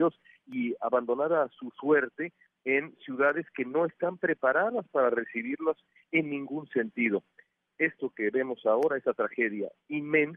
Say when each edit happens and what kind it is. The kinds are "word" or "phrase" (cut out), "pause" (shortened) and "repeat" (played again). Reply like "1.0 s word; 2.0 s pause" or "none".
none